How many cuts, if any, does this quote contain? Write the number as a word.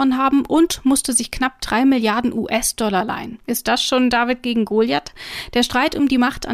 one